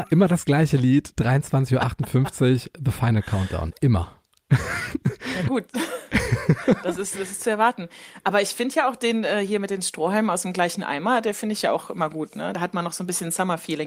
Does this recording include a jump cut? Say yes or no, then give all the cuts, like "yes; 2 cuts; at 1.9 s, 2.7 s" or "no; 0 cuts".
no; 0 cuts